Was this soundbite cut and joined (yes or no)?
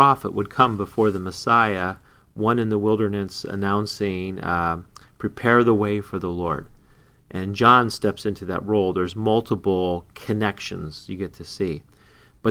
no